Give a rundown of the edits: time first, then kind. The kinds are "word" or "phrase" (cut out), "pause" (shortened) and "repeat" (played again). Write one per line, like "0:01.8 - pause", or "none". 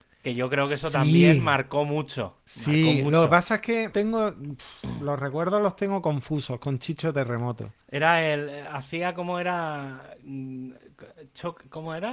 0:02.4 - pause
0:03.9 - word
0:07.8 - pause